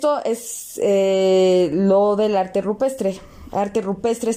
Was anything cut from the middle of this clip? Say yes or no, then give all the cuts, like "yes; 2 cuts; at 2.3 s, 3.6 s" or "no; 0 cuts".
no; 0 cuts